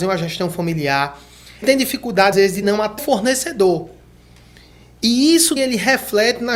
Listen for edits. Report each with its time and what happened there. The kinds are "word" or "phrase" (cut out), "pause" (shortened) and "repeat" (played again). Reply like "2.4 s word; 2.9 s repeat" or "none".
1.6 s word; 2.3 s word; 2.6 s word; 3.0 s word; 5.6 s word

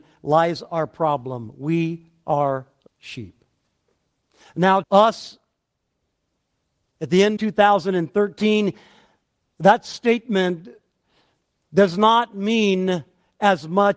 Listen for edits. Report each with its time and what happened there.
2.9 s word; 4.8 s word; 7.4 s word

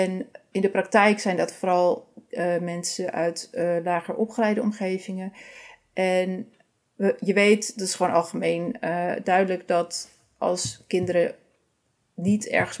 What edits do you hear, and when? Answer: none

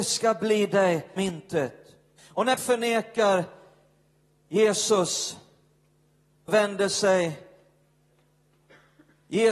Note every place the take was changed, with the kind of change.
1.2 s word; 2.2 s pause; 2.6 s phrase; 6.5 s word

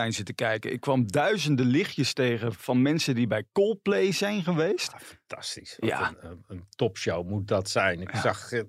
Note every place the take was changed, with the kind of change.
none

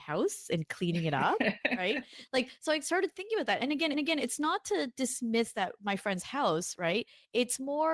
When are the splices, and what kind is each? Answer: 3.9 s repeat

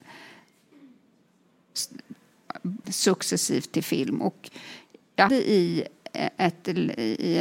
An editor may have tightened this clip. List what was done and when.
2.8 s word; 5.3 s word

